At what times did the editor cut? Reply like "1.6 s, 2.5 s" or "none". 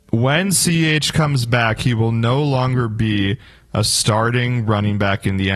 none